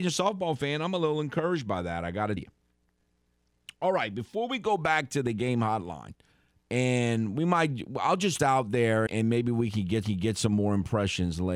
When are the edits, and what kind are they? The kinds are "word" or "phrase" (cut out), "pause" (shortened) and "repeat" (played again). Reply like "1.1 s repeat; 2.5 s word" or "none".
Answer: 2.4 s word; 6.3 s pause; 8.4 s phrase; 9.1 s word; 10.0 s repeat